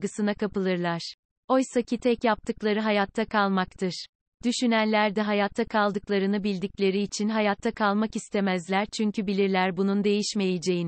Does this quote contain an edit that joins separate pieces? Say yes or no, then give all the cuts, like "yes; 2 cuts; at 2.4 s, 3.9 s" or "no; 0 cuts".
no; 0 cuts